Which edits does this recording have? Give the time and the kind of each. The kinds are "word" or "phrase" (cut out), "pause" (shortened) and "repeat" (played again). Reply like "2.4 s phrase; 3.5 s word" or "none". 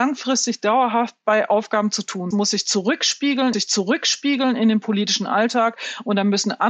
2.3 s phrase; 3.5 s repeat